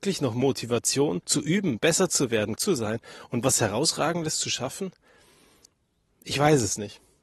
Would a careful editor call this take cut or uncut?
cut